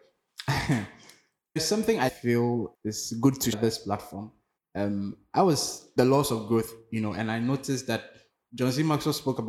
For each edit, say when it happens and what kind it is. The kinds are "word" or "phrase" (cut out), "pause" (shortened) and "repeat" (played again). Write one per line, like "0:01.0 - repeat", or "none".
0:01.6 - phrase
0:02.1 - phrase
0:02.7 - word
0:03.5 - word
0:04.6 - pause
0:06.0 - phrase